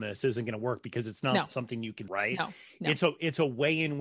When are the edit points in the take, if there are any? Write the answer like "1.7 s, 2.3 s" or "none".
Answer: 2.1 s